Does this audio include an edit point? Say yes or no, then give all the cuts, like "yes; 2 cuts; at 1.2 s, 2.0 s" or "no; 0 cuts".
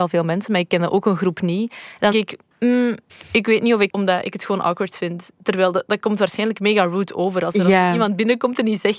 yes; 3 cuts; at 2.1 s, 3.1 s, 3.9 s